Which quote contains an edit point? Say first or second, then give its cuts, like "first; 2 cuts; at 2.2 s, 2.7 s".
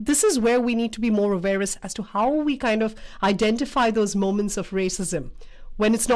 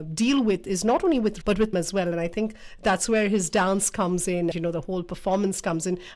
second; 3 cuts; at 1.4 s, 1.7 s, 4.5 s